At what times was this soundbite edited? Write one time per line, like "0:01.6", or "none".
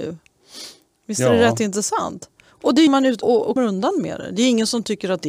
0:02.9
0:03.2
0:03.6